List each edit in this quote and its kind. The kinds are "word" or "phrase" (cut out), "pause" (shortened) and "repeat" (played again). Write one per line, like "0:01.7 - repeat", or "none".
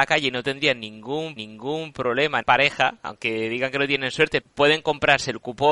0:01.4 - repeat
0:02.4 - word
0:04.4 - word